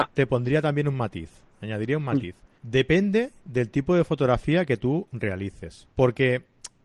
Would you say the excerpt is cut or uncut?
cut